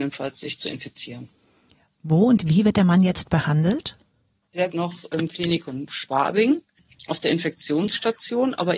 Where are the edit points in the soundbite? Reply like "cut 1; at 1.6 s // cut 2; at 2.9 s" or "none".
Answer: cut 1; at 4.7 s